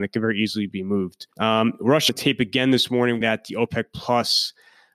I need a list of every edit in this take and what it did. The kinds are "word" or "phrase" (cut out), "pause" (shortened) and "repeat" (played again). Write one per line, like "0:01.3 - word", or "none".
0:01.3 - pause
0:02.1 - phrase
0:03.2 - word